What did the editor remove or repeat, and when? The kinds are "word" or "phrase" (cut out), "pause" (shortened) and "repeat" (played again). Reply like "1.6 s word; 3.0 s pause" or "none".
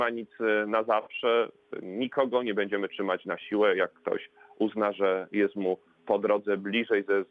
none

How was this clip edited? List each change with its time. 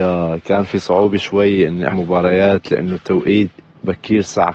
1.9 s word

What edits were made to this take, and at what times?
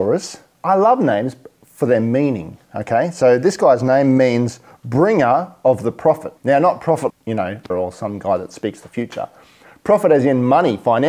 4.7 s pause; 6.4 s pause; 7.1 s word; 7.7 s word

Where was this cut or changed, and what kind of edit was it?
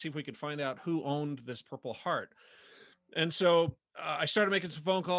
none

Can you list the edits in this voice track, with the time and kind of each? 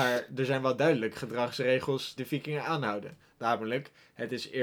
2.2 s word

